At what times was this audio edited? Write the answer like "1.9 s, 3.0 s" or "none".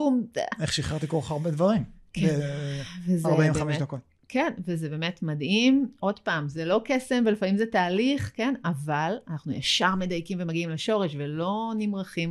none